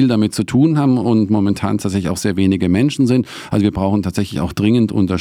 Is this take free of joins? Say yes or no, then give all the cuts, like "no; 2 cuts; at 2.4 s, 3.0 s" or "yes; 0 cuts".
yes; 0 cuts